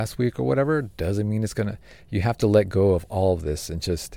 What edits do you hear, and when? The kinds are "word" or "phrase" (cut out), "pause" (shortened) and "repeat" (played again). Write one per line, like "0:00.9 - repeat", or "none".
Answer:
none